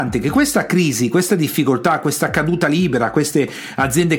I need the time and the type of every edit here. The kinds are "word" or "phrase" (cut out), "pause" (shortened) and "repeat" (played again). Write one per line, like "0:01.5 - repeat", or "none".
none